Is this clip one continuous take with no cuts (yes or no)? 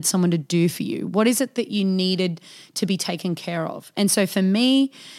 yes